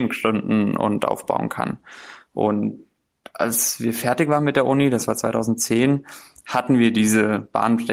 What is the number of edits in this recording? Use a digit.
0